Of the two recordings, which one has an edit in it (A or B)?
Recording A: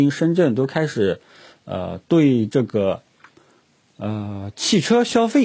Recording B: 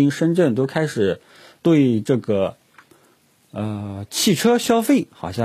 B